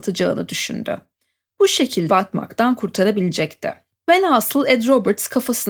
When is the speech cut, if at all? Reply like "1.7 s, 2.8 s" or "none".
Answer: 2.1 s